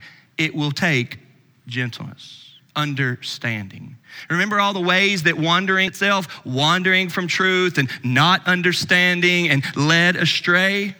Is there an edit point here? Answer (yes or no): yes